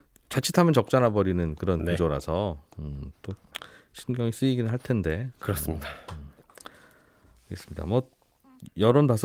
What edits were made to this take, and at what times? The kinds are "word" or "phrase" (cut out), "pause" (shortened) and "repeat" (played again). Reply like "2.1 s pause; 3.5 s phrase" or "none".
none